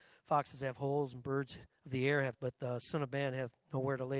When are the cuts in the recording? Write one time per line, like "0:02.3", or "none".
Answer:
0:01.8
0:02.3